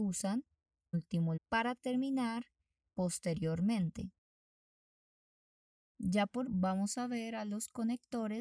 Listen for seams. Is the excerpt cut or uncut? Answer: cut